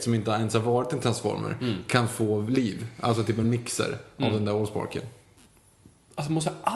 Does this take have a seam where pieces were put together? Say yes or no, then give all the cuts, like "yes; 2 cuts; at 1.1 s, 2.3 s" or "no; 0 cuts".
no; 0 cuts